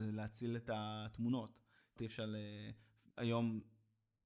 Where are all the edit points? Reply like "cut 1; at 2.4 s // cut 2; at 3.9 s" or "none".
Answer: cut 1; at 2.0 s // cut 2; at 3.1 s